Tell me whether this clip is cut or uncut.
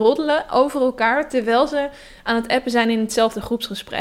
uncut